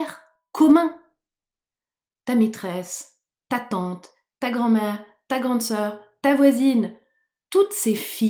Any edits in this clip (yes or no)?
no